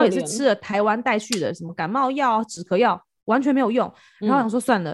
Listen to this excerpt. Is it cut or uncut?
uncut